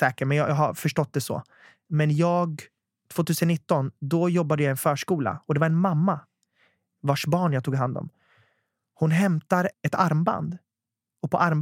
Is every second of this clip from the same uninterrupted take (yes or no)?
yes